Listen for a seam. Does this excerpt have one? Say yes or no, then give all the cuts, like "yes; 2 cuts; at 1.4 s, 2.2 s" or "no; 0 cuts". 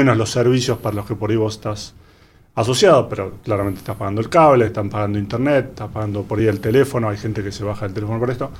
no; 0 cuts